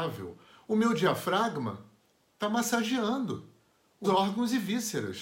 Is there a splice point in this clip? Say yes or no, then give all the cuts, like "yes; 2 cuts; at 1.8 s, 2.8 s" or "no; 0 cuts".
yes; 1 cut; at 4.0 s